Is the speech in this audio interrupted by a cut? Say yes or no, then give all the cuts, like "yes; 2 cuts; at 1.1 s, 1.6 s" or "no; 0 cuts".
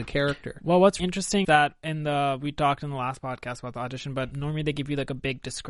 yes; 3 cuts; at 1.0 s, 1.4 s, 4.3 s